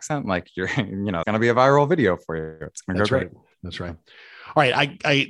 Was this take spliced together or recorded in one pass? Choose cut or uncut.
cut